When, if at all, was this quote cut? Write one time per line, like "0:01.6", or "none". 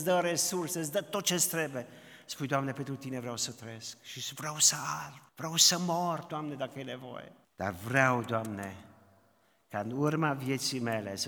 0:05.3
0:07.4